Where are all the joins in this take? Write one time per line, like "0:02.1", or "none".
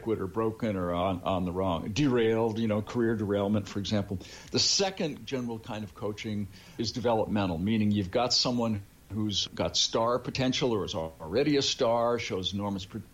none